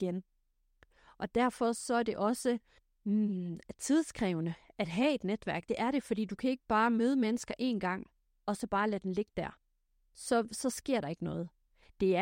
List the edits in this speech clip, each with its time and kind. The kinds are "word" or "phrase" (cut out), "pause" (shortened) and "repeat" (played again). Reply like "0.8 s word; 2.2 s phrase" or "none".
none

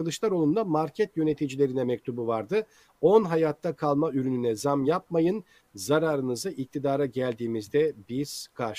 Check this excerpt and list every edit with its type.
none

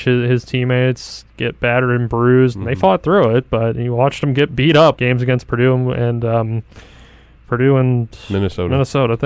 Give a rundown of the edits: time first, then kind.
5.0 s word

